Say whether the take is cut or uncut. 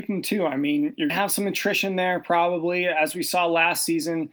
cut